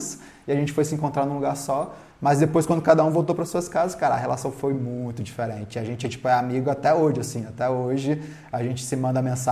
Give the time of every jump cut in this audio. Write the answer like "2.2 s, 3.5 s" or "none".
none